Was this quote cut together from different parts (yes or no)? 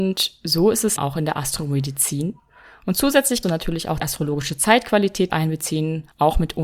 yes